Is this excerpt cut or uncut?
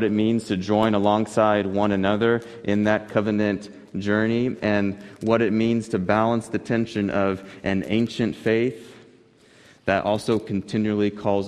uncut